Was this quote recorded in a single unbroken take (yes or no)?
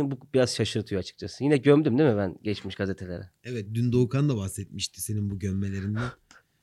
yes